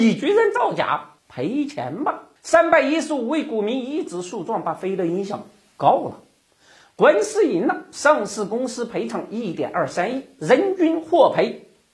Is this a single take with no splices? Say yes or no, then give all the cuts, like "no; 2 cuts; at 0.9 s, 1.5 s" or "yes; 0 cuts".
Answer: no; 2 cuts; at 1.2 s, 2.4 s